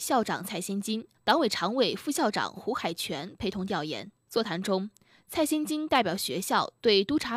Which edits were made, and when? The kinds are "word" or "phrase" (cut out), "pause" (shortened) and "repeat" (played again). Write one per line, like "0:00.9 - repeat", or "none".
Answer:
0:01.1 - pause
0:04.2 - pause